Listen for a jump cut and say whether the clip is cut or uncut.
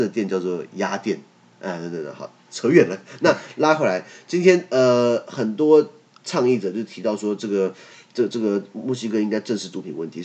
uncut